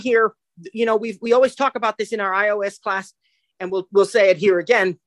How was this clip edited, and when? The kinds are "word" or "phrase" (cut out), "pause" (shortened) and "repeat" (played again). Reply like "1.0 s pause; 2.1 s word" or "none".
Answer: none